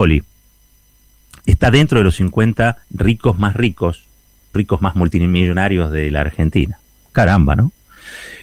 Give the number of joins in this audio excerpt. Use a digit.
2